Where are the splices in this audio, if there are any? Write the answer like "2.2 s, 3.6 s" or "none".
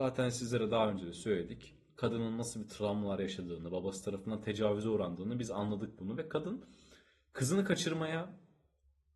none